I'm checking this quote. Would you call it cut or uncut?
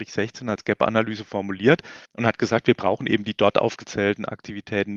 cut